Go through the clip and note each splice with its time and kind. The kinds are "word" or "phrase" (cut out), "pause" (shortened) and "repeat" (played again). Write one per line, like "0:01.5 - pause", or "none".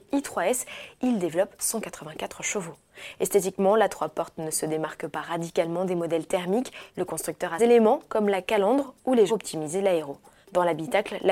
0:07.6 - phrase
0:09.3 - phrase